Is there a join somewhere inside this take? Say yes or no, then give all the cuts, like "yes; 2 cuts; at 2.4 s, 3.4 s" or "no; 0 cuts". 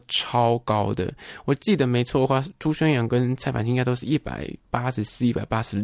yes; 1 cut; at 4.6 s